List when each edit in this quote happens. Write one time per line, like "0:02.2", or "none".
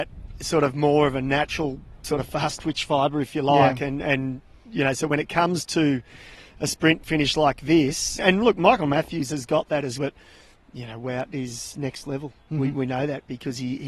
0:08.2
0:10.0